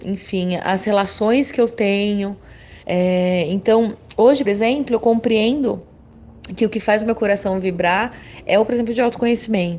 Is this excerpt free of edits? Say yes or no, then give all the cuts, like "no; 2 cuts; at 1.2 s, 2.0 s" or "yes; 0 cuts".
no; 3 cuts; at 2.8 s, 4.4 s, 8.7 s